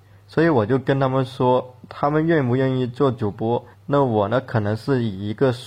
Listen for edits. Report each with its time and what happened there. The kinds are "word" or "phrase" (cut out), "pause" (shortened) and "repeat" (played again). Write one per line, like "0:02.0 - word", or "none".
0:03.7 - pause